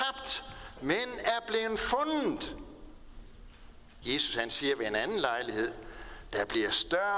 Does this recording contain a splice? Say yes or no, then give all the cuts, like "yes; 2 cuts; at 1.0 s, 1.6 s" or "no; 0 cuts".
no; 0 cuts